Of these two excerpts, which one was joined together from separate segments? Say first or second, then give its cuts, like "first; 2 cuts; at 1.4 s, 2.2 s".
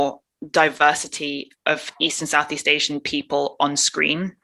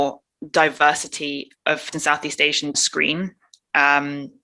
second; 2 cuts; at 1.9 s, 2.7 s